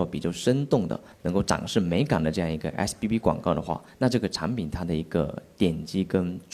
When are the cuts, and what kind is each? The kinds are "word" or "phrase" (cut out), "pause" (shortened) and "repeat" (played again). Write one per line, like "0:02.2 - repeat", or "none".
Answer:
none